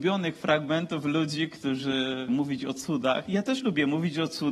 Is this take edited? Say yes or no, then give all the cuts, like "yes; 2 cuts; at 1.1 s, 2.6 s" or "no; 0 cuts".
yes; 1 cut; at 2.3 s